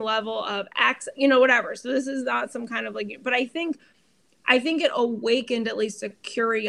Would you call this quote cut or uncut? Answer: uncut